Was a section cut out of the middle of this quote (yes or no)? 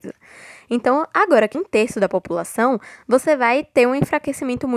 yes